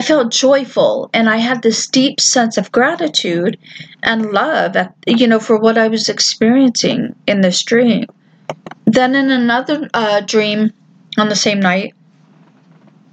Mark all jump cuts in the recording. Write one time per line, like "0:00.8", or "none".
0:08.8